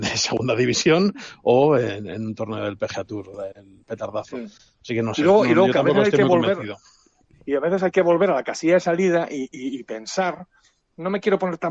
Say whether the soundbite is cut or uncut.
cut